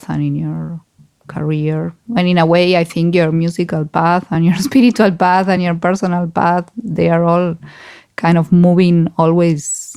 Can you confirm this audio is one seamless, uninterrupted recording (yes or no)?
yes